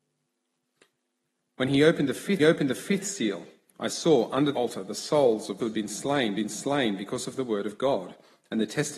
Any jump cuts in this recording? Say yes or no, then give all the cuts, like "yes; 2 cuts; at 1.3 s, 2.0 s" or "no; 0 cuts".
yes; 4 cuts; at 2.4 s, 4.5 s, 5.6 s, 6.4 s